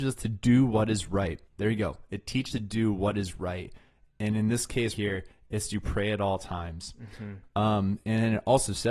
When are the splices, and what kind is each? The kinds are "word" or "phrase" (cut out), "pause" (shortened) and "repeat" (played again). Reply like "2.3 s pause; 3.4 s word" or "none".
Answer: 1.5 s pause; 2.5 s word; 4.9 s word

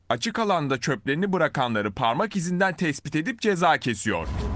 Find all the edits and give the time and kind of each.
none

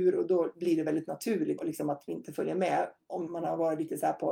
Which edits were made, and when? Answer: 1.6 s word; 2.1 s word; 3.3 s word

